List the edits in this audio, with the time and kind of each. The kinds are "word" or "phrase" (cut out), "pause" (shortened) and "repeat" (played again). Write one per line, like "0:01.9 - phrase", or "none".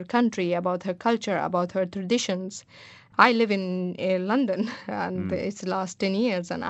none

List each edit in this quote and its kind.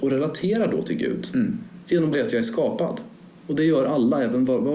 0:02.1 - word

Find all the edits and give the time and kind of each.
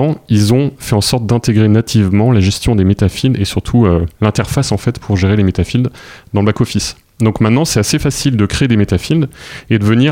0:04.1 - pause

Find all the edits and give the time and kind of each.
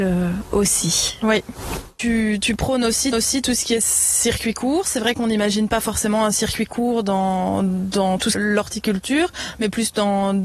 0:03.1 - repeat
0:07.6 - word
0:08.3 - phrase

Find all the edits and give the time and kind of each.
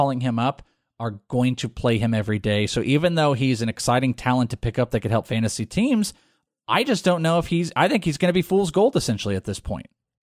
none

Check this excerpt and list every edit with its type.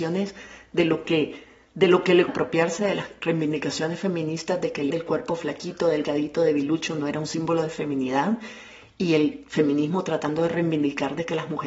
0:02.3 - word
0:04.9 - word

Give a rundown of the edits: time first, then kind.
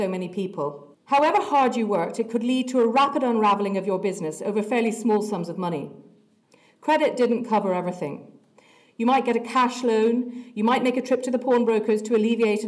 0:00.9 - pause

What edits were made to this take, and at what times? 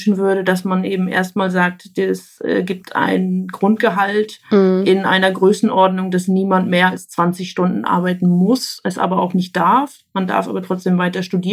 none

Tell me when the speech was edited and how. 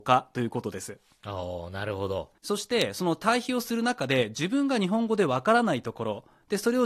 0:02.4 - pause

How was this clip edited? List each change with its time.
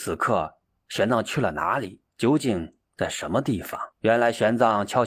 0:02.1 - pause
0:03.9 - pause

